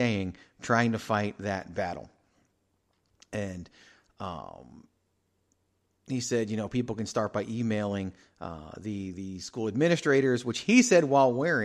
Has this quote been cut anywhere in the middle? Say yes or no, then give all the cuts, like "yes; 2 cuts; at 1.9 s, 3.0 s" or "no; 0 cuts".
no; 0 cuts